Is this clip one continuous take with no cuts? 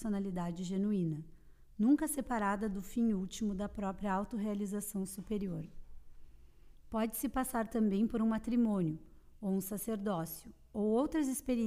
yes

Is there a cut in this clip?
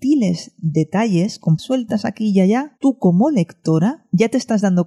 yes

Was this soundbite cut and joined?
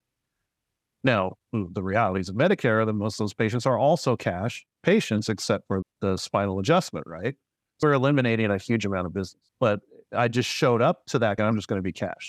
yes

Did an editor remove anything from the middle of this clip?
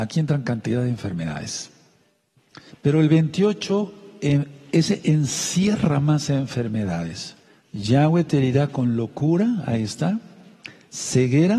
yes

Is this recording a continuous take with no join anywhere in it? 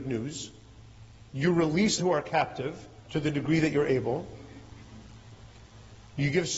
no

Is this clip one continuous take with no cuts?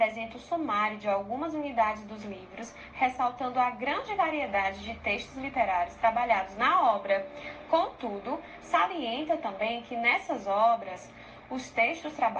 yes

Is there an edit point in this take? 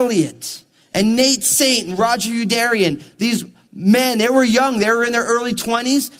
no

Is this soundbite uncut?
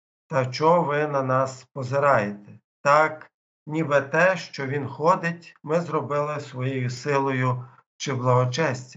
yes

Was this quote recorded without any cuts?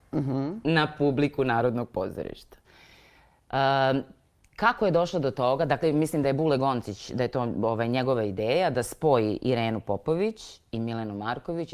yes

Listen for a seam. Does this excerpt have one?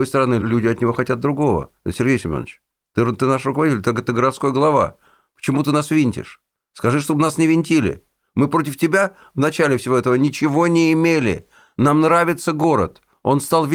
no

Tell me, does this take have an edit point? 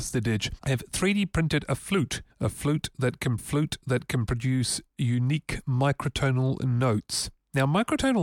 yes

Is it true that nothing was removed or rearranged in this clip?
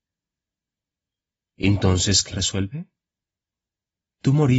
no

